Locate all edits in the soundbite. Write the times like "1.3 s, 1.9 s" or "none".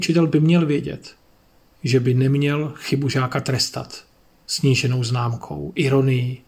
none